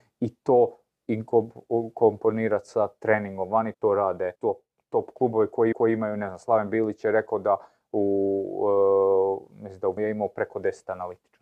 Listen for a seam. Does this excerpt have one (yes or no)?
yes